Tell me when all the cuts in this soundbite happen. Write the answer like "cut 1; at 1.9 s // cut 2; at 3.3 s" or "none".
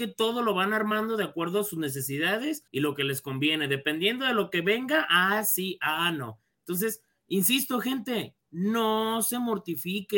cut 1; at 2.7 s